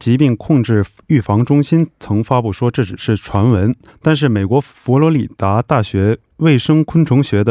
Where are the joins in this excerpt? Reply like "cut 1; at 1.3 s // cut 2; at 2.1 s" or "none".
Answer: cut 1; at 3.9 s